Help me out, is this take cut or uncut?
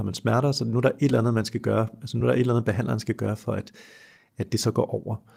uncut